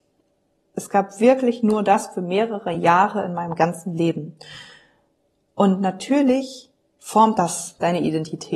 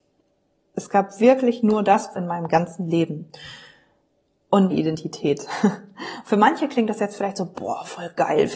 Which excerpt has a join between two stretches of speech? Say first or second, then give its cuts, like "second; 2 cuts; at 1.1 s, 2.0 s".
second; 2 cuts; at 2.2 s, 4.7 s